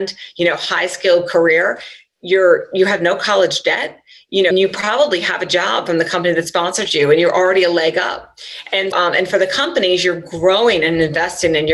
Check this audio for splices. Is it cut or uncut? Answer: cut